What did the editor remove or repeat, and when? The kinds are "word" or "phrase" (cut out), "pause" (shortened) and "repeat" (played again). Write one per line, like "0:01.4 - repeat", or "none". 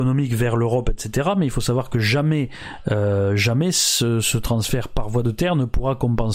none